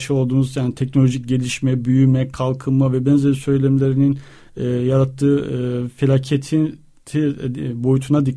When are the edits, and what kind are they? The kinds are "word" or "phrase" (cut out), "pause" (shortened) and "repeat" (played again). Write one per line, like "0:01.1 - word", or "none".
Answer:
none